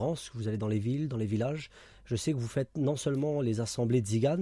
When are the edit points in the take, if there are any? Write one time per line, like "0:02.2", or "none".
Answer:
none